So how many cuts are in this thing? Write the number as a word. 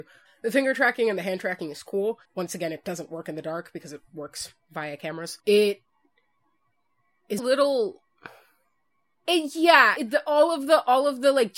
four